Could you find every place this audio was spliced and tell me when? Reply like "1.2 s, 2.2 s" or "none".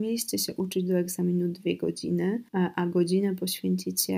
2.5 s